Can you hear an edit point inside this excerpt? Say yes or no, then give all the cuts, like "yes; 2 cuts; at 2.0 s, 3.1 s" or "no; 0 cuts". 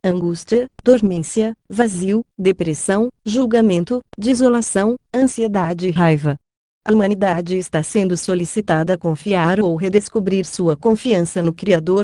no; 0 cuts